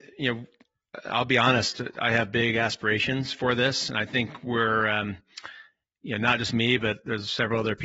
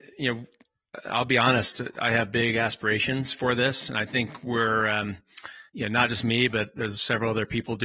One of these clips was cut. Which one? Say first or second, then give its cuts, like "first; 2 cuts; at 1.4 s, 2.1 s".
second; 1 cut; at 5.7 s